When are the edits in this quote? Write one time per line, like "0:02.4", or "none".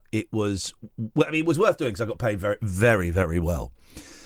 none